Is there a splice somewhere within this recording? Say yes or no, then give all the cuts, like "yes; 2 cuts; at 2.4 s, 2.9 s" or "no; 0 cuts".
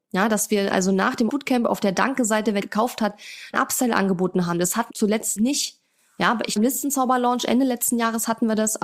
yes; 6 cuts; at 1.3 s, 2.6 s, 3.5 s, 4.9 s, 5.4 s, 6.6 s